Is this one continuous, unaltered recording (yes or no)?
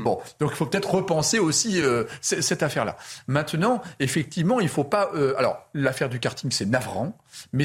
yes